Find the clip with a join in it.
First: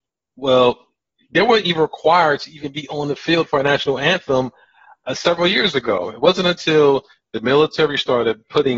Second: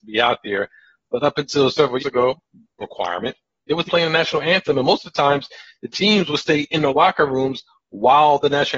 second; 3 cuts; at 2.0 s, 2.8 s, 3.9 s

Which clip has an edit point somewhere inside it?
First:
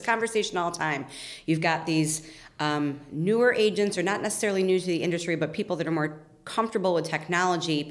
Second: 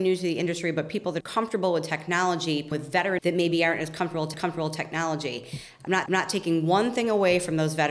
second; 5 cuts; at 1.2 s, 2.7 s, 3.2 s, 4.3 s, 6.1 s

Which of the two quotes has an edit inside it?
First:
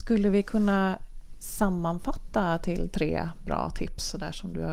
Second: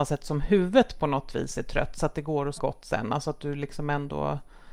second; 1 cut; at 2.6 s

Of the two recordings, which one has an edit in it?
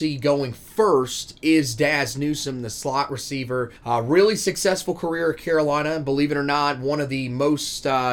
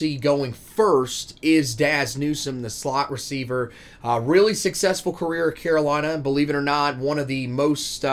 first; 1 cut; at 3.8 s

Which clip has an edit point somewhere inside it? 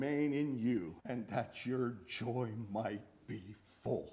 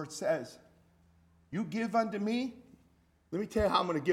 first; 1 cut; at 1.0 s

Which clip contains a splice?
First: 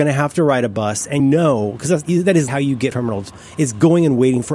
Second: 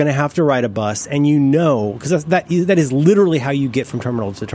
first; 5 cuts; at 1.2 s, 2.0 s, 2.5 s, 2.9 s, 3.3 s

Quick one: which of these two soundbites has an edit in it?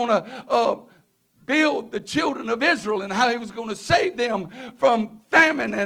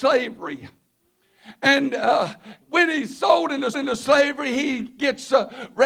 second; 2 cuts; at 2.6 s, 3.7 s

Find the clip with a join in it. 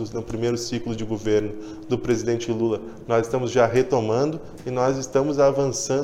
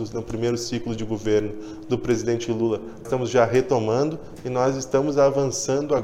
second; 1 cut; at 3.0 s

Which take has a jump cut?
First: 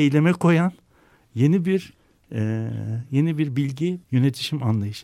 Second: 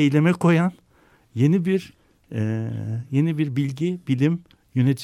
first; 1 cut; at 4.0 s

